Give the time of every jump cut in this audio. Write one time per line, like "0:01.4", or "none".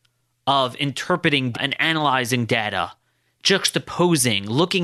0:01.5